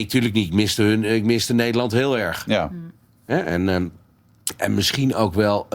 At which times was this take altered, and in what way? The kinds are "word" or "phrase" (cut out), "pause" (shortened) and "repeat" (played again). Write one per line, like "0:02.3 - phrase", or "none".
none

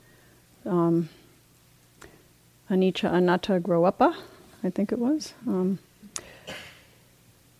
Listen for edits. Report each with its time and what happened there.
none

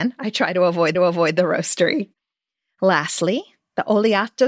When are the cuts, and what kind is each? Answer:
0:00.9 - repeat

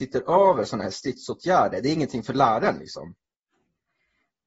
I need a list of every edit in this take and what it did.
none

